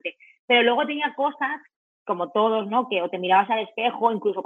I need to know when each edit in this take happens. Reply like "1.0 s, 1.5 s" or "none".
none